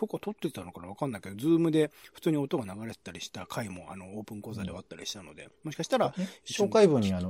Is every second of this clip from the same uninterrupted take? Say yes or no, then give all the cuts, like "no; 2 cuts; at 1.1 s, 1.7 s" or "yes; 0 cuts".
yes; 0 cuts